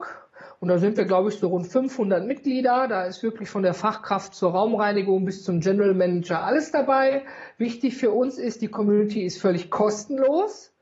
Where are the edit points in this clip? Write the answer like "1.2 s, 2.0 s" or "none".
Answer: none